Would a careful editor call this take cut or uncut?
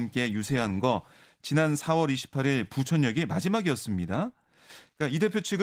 uncut